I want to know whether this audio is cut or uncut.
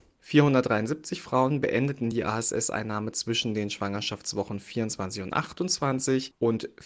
uncut